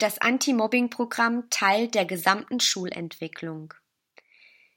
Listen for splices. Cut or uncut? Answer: uncut